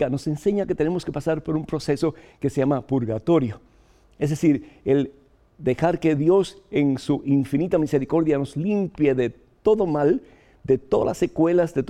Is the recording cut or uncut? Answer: uncut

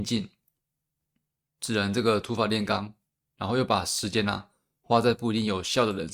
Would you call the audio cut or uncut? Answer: uncut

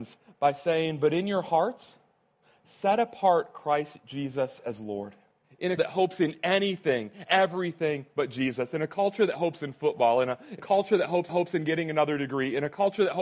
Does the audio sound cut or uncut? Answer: cut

